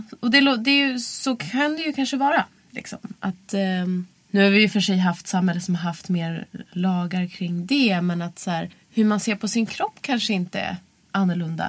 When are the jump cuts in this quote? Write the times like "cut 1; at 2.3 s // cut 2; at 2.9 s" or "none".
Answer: cut 1; at 8.7 s